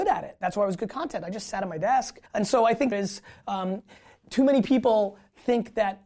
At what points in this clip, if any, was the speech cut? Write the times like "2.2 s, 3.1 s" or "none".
2.3 s, 2.9 s